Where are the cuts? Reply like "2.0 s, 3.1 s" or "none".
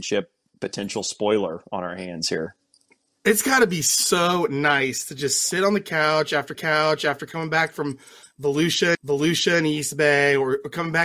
2.8 s, 6.5 s, 8.9 s

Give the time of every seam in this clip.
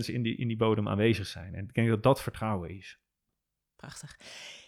none

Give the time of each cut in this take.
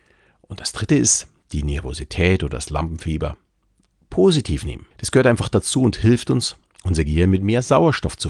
4.9 s

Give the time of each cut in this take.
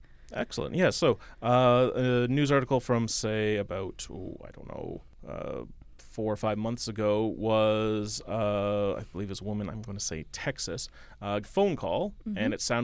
11.4 s

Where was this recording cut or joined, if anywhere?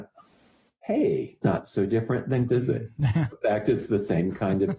1.4 s, 2.5 s, 3.3 s

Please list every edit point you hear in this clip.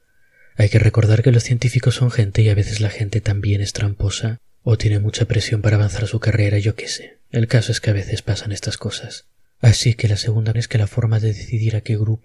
10.5 s

